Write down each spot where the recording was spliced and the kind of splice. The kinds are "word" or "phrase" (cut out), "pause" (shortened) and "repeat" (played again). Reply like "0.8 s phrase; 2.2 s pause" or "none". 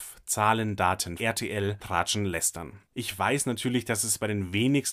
1.2 s phrase; 1.8 s word